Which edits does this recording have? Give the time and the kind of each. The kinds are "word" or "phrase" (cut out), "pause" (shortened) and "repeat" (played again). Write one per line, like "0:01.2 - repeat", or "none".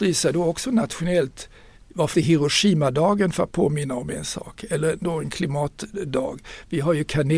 0:02.1 - word